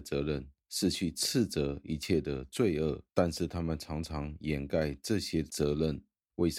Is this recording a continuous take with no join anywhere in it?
no; 1 cut; at 3.1 s

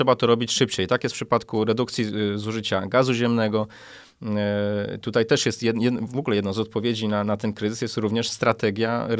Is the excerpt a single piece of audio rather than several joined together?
yes; 0 cuts

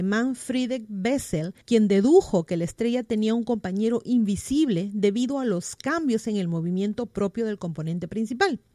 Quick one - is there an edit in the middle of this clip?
yes; 1 cut; at 1.6 s

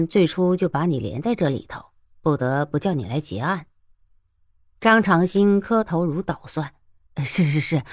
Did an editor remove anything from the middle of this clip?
no; 0 cuts

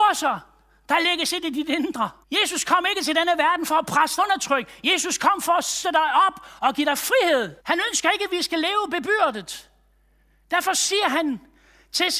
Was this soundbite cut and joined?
yes; 4 cuts; at 2.2 s, 4.2 s, 5.8 s, 7.6 s

